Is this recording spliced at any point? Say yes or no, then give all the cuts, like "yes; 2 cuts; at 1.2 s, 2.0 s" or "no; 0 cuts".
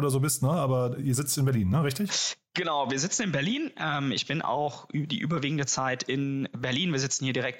no; 0 cuts